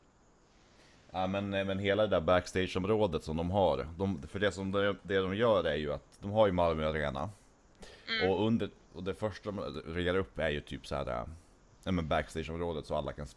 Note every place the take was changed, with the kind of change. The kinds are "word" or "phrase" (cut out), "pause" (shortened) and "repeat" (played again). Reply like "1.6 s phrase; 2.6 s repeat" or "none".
none